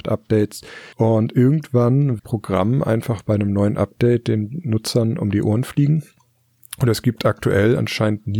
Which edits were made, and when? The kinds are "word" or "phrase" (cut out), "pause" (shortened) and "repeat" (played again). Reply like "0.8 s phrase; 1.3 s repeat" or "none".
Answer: 0.9 s pause; 2.2 s phrase

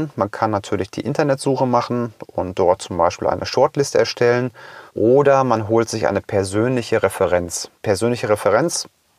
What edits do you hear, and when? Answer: 4.9 s pause; 7.8 s pause

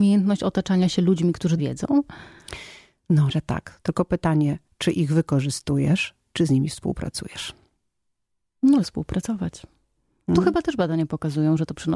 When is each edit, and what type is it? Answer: 1.6 s word; 3.3 s word; 8.8 s word

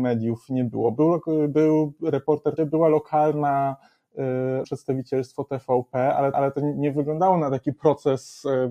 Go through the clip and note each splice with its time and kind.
2.6 s phrase; 4.6 s word; 6.3 s repeat

